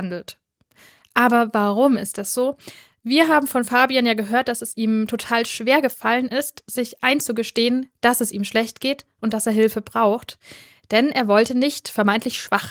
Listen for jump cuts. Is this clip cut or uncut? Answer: uncut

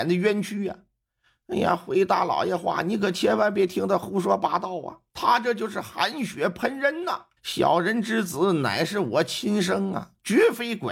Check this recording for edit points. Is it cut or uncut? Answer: cut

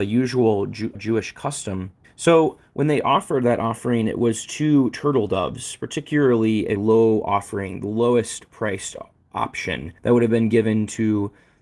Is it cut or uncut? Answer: cut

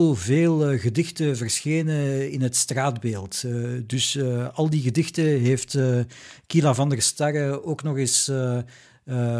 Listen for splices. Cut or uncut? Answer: uncut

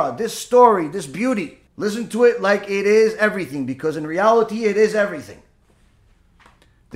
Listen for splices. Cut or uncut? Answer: cut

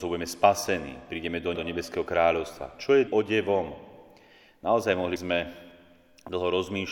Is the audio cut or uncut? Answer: cut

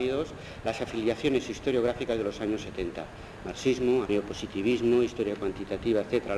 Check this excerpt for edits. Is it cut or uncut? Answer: cut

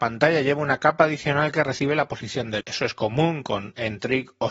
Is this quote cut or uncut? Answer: cut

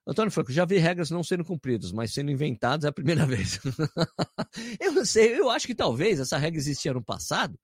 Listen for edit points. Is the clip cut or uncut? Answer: uncut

